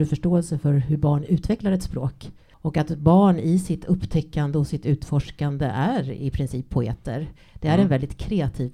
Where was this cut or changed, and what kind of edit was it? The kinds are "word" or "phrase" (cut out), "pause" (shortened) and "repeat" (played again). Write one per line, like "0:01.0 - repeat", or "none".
none